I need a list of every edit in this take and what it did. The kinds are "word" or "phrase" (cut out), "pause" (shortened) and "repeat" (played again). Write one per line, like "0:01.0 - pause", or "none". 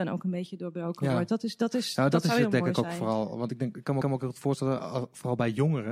0:04.0 - repeat